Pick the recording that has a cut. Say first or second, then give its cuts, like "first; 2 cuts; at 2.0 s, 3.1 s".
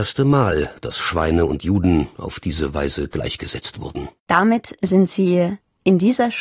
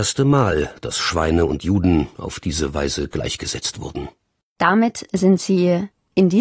first; 1 cut; at 4.2 s